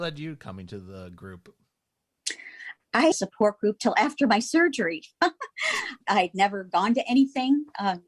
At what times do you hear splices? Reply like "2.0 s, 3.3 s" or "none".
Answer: 3.1 s, 6.0 s